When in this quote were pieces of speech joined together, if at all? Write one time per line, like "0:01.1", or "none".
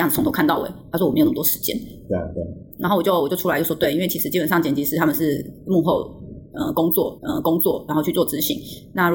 0:07.2